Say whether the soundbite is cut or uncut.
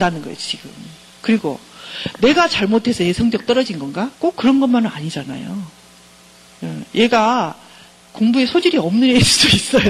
cut